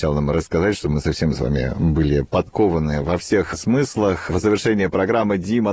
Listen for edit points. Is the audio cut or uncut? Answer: uncut